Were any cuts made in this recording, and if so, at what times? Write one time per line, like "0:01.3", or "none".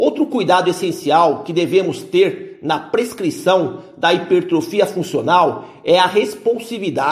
none